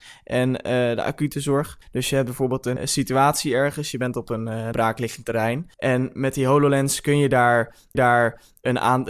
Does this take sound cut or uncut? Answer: cut